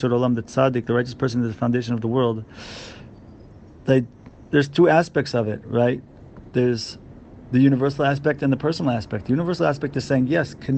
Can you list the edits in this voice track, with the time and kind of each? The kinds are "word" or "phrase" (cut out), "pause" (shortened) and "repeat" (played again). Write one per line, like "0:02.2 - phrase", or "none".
none

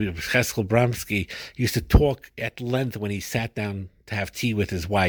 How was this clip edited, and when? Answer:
none

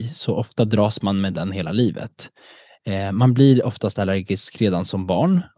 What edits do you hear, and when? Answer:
none

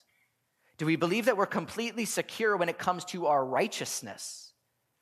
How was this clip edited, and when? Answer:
none

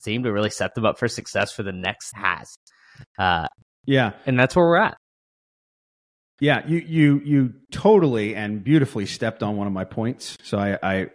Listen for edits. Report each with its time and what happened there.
0:02.1 - word

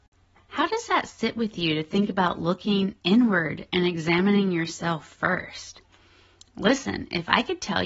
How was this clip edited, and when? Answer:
none

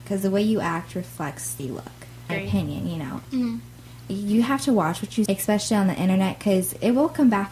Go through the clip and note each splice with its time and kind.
0:01.6 - word
0:02.3 - phrase
0:03.2 - word
0:05.3 - word

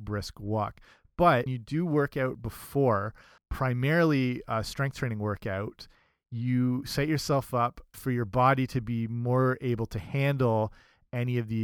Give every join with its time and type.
0:01.5 - word
0:03.4 - word
0:07.9 - word

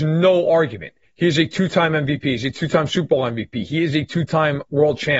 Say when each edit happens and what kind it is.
0:01.0 - pause

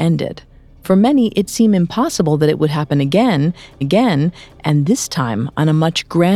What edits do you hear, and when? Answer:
0:01.5 - word
0:03.8 - repeat

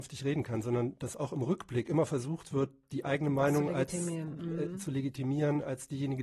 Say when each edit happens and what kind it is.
none

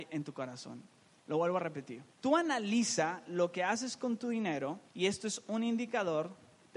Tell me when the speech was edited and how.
0:02.1 - pause
0:04.9 - pause

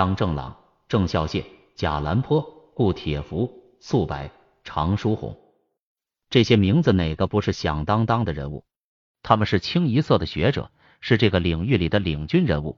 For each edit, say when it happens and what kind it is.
none

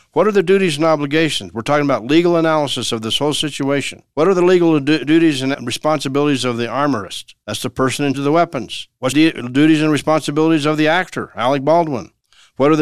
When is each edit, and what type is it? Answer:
0:05.5 - word
0:08.1 - word
0:09.1 - word

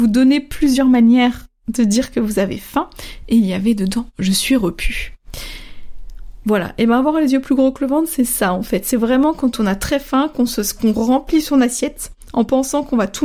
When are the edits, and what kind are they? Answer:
none

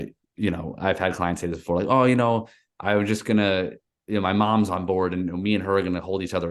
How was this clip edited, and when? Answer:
none

